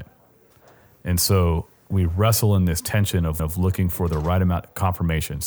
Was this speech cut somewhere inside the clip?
yes; 1 cut; at 3.4 s

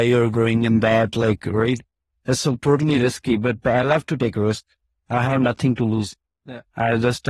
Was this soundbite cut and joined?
no; 0 cuts

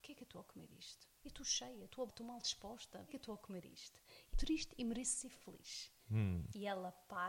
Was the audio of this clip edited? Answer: yes; 5 cuts; at 1.2 s, 2.1 s, 3.1 s, 4.3 s, 6.0 s

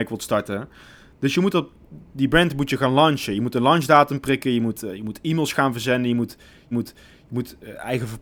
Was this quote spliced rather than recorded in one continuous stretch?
yes; 1 cut; at 6.7 s

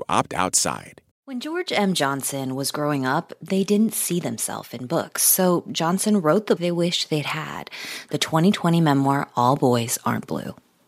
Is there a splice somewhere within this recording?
yes; 2 cuts; at 1.1 s, 6.6 s

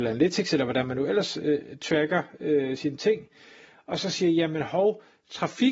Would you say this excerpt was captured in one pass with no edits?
yes; 0 cuts

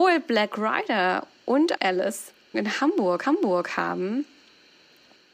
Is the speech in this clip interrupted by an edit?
yes; 3 cuts; at 1.8 s, 2.5 s, 3.2 s

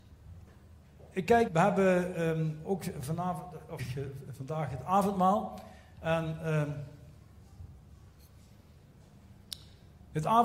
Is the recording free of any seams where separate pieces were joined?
no; 2 cuts; at 1.5 s, 3.8 s

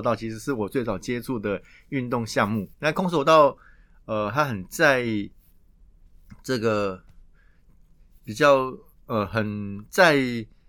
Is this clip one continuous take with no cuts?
no; 1 cut; at 2.7 s

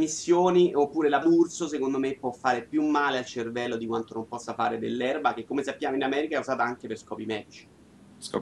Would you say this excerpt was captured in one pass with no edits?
no; 1 cut; at 1.2 s

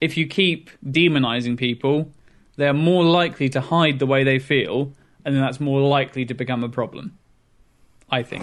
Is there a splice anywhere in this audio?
no; 0 cuts

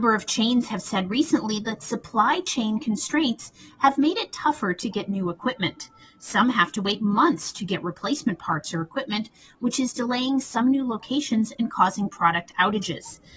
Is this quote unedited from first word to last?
yes; 0 cuts

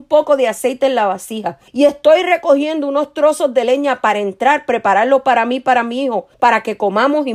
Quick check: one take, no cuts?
no; 2 cuts; at 1.7 s, 6.3 s

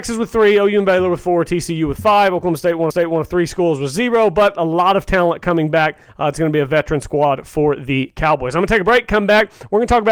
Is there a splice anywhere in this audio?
yes; 1 cut; at 2.9 s

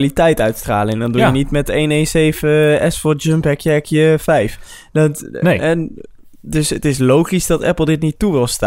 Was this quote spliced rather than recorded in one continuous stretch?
no; 0 cuts

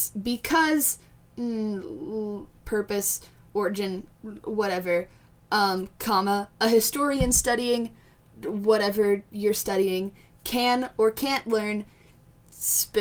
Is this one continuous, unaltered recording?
yes; 0 cuts

